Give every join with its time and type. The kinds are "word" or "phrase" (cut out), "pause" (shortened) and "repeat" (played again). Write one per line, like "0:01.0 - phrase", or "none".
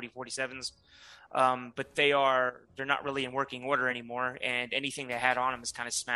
none